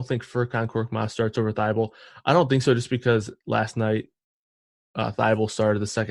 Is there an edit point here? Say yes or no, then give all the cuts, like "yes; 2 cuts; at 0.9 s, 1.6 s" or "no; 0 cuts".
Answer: yes; 1 cut; at 3.4 s